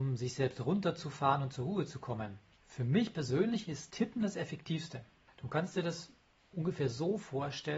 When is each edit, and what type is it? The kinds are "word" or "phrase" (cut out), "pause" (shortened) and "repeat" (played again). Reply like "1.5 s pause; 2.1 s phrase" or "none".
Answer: 3.9 s word